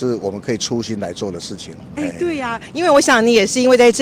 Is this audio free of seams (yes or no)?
yes